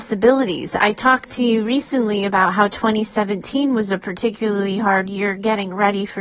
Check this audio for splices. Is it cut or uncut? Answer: uncut